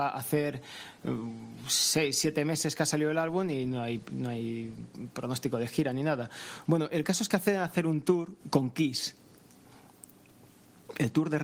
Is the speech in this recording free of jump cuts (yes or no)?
no